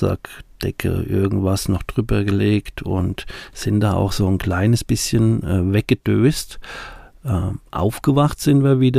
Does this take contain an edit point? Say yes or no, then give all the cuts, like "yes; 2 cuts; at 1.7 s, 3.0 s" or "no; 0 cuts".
no; 0 cuts